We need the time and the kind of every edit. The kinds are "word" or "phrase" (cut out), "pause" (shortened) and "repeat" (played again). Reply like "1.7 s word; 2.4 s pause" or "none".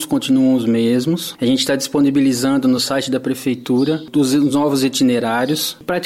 none

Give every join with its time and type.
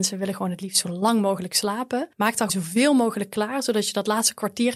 2.1 s pause; 2.5 s word

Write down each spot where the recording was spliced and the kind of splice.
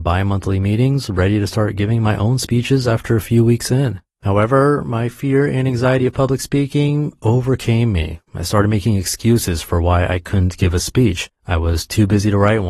4.1 s pause; 8.3 s pause; 11.4 s pause

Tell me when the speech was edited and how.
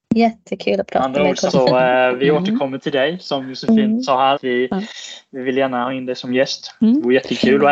4.4 s word

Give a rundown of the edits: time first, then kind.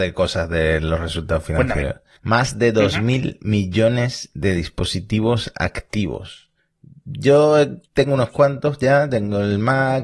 2.2 s pause; 7.9 s pause

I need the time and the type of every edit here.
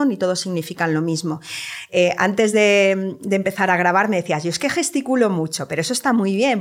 none

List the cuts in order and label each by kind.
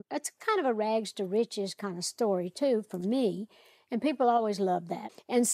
none

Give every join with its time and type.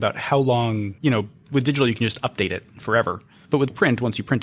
1.0 s pause

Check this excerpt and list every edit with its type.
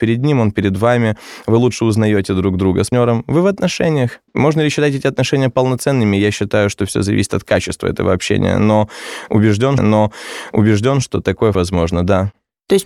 2.9 s word; 4.3 s pause; 9.8 s repeat; 11.5 s word

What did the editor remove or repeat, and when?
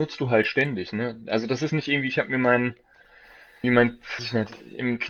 1.7 s word; 3.6 s word; 4.2 s word

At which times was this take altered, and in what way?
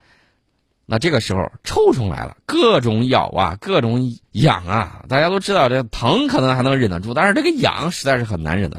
4.3 s pause

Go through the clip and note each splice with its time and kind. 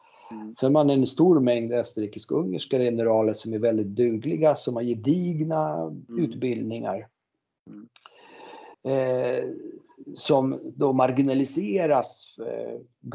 8.7 s pause

